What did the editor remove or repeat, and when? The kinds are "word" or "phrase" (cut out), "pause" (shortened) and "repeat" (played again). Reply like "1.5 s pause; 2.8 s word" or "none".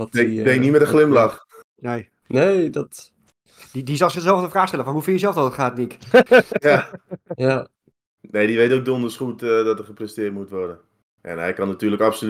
none